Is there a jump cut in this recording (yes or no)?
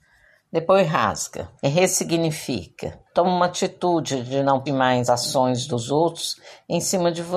yes